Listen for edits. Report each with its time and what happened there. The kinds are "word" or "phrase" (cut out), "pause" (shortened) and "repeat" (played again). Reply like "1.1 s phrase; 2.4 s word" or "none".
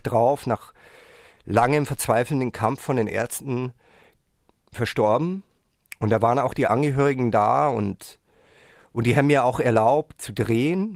none

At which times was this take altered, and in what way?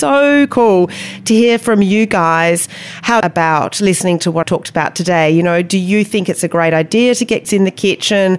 3.2 s phrase; 4.4 s word; 7.4 s word

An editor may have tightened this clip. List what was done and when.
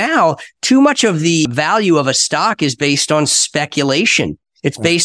none

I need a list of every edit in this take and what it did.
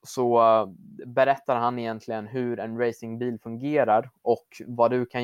none

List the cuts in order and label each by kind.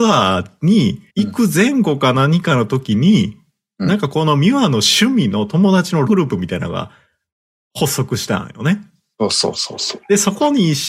1.1 s pause; 6.1 s word

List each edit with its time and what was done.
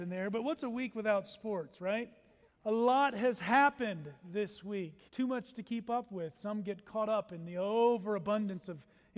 2.5 s pause; 5.1 s pause

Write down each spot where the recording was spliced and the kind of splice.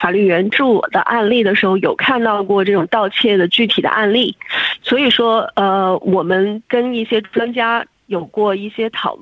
6.6 s pause

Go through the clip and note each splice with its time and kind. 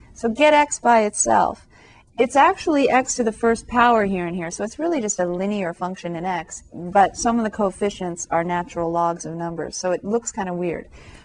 none

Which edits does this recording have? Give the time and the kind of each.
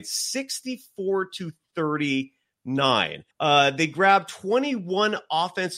3.3 s pause

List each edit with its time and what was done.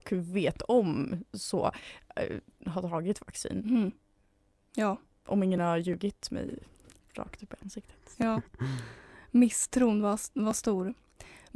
none

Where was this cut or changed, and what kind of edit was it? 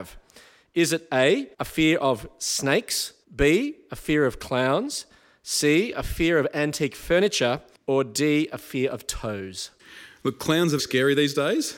1.5 s pause; 3.2 s pause; 7.7 s pause; 10.8 s word

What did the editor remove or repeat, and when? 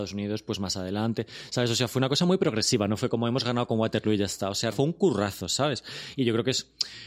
4.7 s word

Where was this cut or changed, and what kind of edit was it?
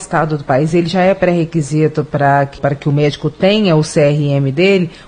2.6 s phrase

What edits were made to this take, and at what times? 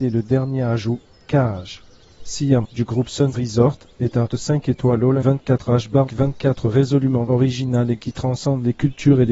2.6 s word; 3.3 s word; 4.3 s word; 5.2 s word; 6.1 s word; 8.0 s word

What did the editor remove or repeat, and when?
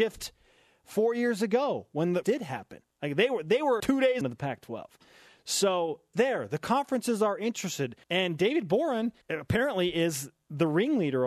2.2 s phrase; 2.9 s pause; 3.8 s word; 4.2 s phrase; 6.1 s phrase; 8.0 s pause; 9.2 s pause

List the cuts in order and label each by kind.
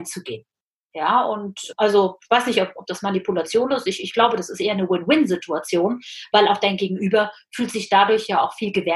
none

